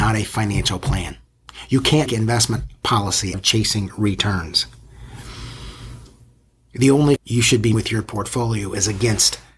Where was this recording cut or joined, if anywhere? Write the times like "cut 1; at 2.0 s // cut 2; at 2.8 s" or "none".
cut 1; at 2.1 s // cut 2; at 3.3 s // cut 3; at 7.2 s // cut 4; at 7.7 s